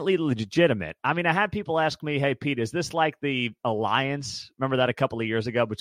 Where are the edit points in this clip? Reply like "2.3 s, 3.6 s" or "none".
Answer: none